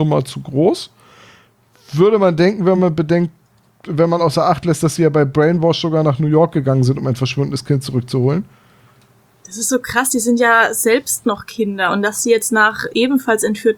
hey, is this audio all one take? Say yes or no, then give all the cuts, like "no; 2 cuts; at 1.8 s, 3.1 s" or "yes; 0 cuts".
yes; 0 cuts